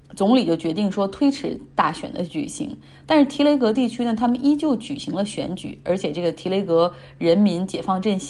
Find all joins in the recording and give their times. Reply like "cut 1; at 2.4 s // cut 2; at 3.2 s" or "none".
none

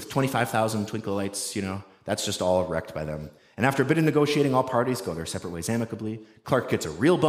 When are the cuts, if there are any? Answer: none

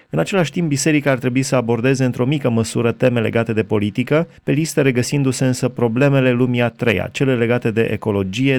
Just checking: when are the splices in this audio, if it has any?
cut 1; at 4.4 s

